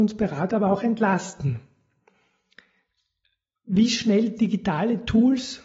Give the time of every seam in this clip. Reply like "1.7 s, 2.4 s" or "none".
none